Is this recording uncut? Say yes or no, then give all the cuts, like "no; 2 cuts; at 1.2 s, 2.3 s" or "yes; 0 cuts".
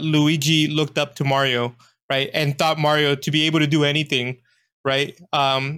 yes; 0 cuts